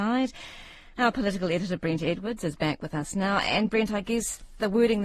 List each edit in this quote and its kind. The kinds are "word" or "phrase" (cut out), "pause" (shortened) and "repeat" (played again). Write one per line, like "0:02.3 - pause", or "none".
none